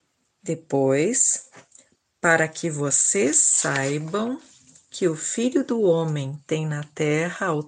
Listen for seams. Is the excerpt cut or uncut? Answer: uncut